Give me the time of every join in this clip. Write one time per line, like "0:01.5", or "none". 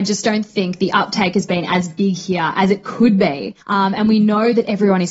0:03.6